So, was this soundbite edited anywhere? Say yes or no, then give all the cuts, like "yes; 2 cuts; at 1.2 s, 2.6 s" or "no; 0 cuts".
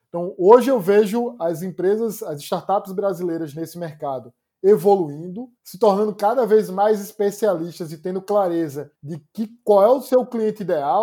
yes; 2 cuts; at 5.6 s, 9.0 s